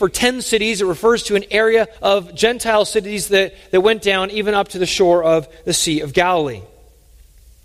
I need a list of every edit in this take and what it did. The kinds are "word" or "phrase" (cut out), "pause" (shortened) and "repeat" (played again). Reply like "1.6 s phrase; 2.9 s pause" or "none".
2.0 s pause